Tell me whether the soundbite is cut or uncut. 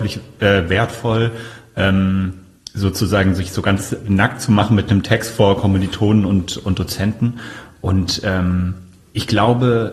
uncut